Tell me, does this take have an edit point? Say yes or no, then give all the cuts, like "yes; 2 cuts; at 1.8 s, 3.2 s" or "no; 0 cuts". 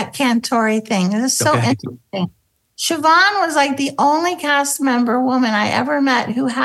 no; 0 cuts